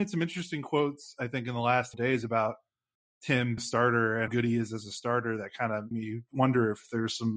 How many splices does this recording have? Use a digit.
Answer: 4